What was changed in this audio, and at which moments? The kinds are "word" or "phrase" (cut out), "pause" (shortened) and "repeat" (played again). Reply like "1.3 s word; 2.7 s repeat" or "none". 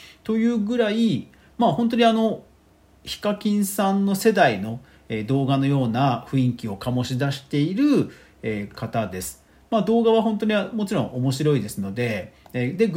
none